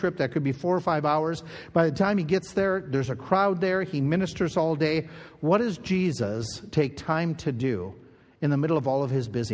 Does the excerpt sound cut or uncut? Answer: uncut